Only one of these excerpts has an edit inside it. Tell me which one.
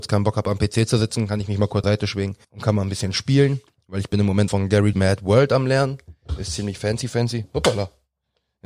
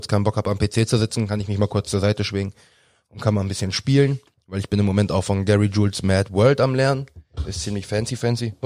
first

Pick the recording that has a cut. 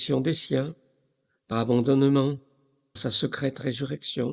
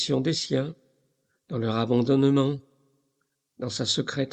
first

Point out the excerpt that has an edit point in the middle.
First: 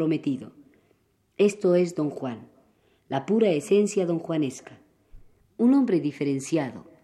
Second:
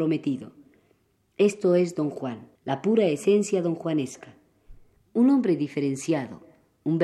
second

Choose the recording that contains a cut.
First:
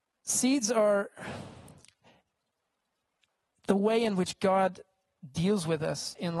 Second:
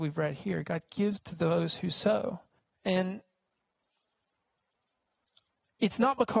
second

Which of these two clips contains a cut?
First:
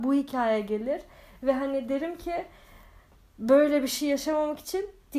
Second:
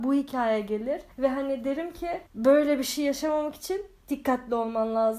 second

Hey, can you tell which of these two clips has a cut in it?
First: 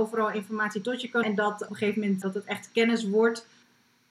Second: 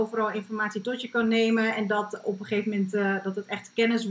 first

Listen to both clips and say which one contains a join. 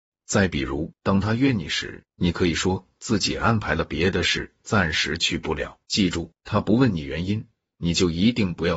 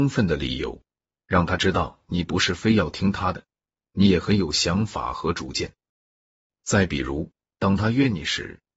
first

